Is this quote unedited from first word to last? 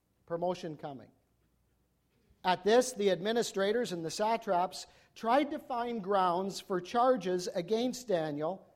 yes; 0 cuts

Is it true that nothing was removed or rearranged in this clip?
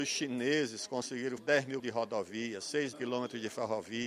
no; 3 cuts; at 1.4 s, 1.8 s, 2.9 s

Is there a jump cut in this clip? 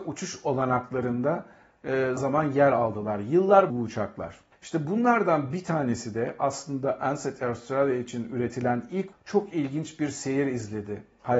yes; 4 cuts; at 2.2 s, 3.7 s, 4.5 s, 9.1 s

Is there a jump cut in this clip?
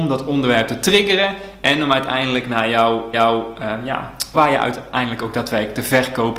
yes; 2 cuts; at 3.1 s, 4.3 s

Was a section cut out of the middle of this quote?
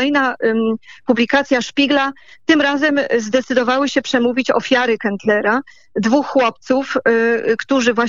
no; 0 cuts

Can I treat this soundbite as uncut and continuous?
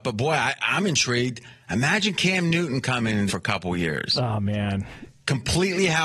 no; 1 cut; at 3.3 s

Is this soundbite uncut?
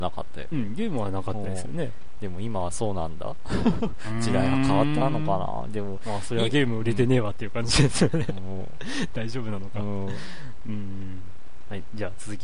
yes; 0 cuts

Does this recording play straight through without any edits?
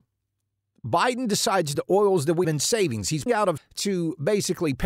no; 4 cuts; at 1.8 s, 2.4 s, 3.3 s, 3.6 s

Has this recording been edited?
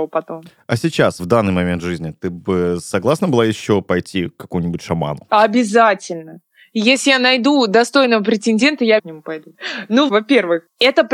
yes; 3 cuts; at 1.2 s, 9.0 s, 10.1 s

